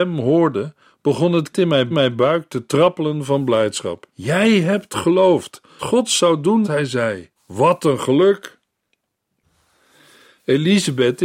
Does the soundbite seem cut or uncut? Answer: cut